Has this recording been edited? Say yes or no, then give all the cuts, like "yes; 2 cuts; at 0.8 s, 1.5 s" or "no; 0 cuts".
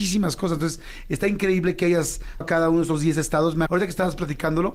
yes; 2 cuts; at 2.4 s, 3.7 s